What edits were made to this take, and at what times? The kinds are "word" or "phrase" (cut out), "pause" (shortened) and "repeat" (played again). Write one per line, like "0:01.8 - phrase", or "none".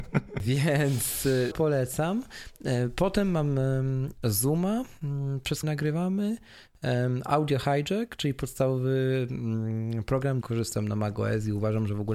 0:01.5 - phrase
0:05.6 - word
0:10.4 - phrase

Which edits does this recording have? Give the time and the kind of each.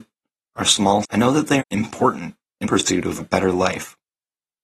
0:01.0 - word
0:01.6 - word
0:02.6 - word
0:03.2 - word

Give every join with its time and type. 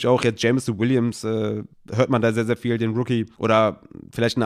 0:03.3 - pause

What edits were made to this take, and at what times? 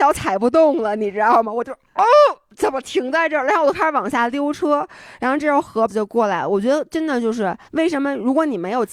0:05.9 - word
0:07.6 - pause

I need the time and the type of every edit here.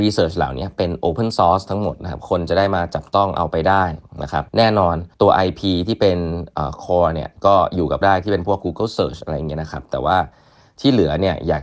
0:04.5 - pause
0:05.1 - pause
0:08.0 - word

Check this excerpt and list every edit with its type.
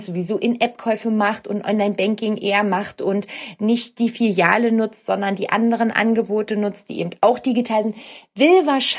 none

